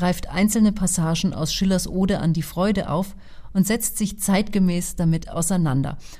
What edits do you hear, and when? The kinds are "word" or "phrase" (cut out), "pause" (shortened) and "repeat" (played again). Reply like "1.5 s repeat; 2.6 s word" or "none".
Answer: none